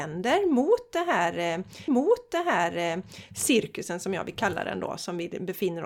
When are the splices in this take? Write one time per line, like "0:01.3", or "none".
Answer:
0:01.9

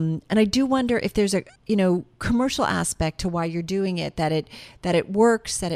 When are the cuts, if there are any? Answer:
0:01.6

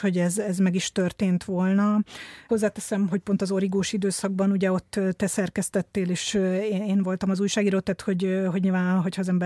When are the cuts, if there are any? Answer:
0:03.1

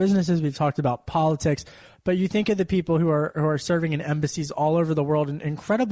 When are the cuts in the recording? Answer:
none

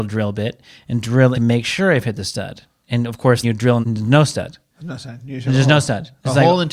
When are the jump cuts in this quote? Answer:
0:01.3
0:03.4
0:03.8

